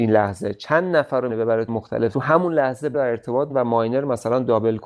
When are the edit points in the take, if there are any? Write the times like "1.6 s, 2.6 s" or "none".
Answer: 1.3 s, 1.7 s, 2.1 s, 2.9 s, 3.5 s